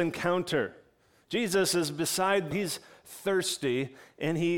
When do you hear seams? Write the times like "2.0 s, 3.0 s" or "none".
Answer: 2.5 s